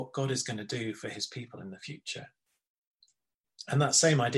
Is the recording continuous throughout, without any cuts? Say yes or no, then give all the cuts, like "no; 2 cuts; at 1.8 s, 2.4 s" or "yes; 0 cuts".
yes; 0 cuts